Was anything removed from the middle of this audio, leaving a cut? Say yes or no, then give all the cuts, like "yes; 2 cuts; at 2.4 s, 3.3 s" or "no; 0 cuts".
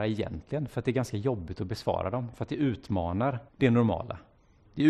yes; 1 cut; at 3.5 s